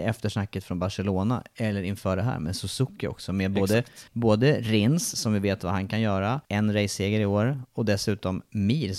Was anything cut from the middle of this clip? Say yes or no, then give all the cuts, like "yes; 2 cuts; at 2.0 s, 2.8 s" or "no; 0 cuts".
yes; 2 cuts; at 4.1 s, 6.4 s